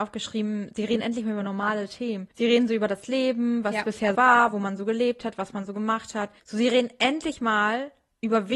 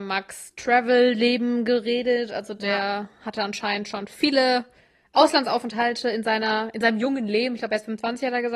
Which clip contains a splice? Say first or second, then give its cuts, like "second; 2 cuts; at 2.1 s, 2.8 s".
first; 3 cuts; at 2.3 s, 4.1 s, 6.4 s